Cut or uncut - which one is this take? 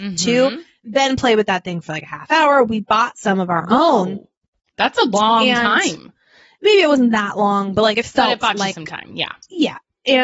uncut